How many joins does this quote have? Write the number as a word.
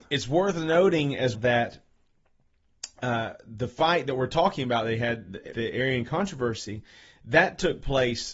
two